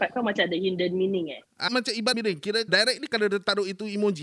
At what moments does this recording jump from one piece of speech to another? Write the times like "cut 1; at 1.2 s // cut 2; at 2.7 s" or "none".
cut 1; at 1.7 s // cut 2; at 2.1 s // cut 3; at 2.7 s